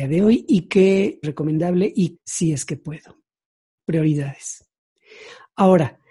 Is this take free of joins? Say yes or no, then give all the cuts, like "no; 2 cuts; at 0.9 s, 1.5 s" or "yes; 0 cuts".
no; 2 cuts; at 1.2 s, 2.2 s